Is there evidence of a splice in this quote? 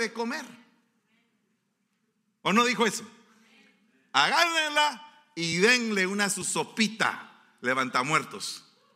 no; 0 cuts

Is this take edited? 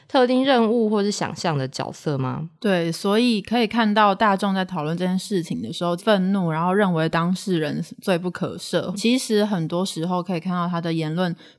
yes; 3 cuts; at 2.6 s, 6.0 s, 8.9 s

